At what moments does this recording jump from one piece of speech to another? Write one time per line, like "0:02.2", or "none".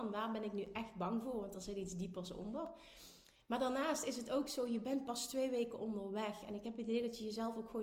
none